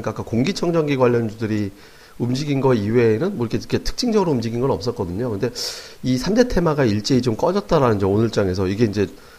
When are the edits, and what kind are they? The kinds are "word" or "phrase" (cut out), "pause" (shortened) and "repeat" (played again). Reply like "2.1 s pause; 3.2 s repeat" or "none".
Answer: none